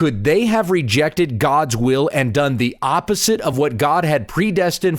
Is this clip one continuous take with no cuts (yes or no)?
yes